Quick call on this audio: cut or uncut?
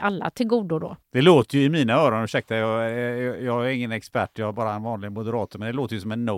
cut